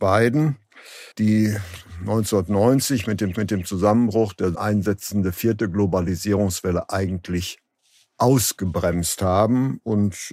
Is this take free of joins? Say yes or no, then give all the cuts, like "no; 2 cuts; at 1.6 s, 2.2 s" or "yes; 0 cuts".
no; 4 cuts; at 1.1 s, 3.3 s, 4.5 s, 7.7 s